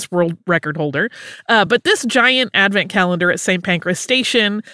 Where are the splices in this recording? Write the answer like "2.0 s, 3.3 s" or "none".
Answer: none